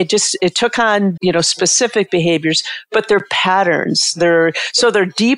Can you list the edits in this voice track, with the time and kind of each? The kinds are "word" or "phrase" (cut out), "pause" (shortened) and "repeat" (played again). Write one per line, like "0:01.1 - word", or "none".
0:01.2 - word